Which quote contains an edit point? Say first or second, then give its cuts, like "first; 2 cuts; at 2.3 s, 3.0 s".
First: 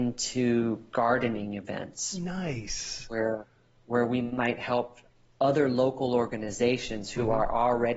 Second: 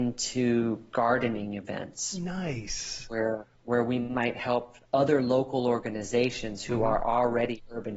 second; 2 cuts; at 3.6 s, 4.9 s